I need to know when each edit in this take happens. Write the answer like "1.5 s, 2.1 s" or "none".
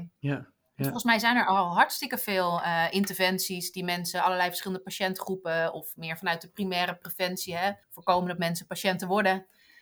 7.8 s